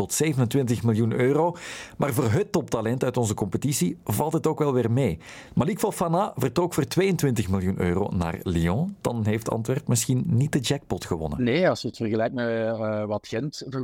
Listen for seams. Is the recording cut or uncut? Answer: uncut